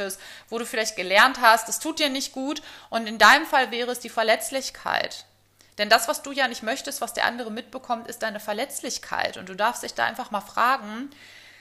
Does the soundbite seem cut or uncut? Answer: uncut